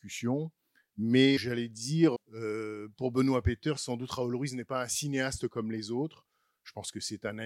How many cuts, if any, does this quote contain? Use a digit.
2